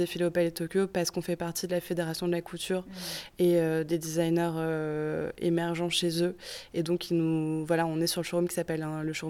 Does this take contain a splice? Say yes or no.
no